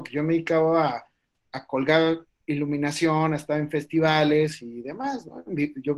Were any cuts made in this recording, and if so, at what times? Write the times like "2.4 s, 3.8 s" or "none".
none